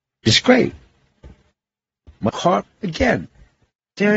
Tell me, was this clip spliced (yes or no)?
yes